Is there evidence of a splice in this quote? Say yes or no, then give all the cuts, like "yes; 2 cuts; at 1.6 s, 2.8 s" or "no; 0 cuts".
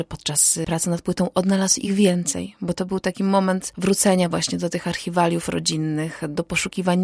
no; 0 cuts